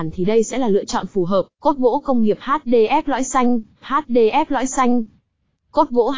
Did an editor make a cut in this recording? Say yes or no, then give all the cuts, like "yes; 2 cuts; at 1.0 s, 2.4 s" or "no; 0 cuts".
yes; 2 cuts; at 1.5 s, 3.8 s